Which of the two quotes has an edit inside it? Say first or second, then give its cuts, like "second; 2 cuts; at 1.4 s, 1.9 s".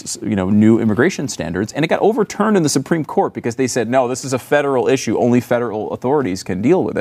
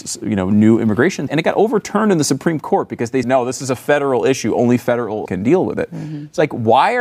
second; 3 cuts; at 1.3 s, 3.2 s, 5.3 s